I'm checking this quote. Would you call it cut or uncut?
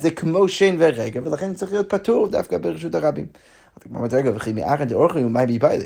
uncut